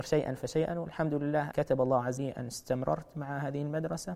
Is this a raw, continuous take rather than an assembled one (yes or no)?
no